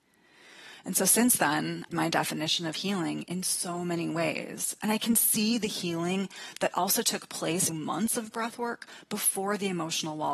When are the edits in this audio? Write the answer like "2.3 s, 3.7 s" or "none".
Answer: 1.9 s, 7.7 s